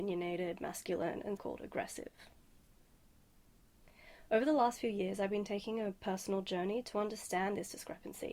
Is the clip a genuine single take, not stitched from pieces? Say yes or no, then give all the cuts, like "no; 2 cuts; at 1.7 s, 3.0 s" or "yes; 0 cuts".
no; 1 cut; at 1.4 s